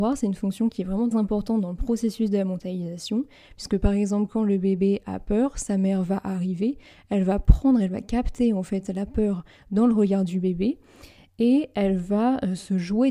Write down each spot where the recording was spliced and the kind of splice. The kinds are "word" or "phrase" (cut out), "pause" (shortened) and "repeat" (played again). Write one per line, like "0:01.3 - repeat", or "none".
0:01.1 - word